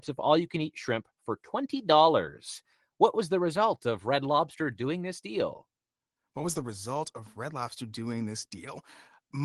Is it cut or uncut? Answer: uncut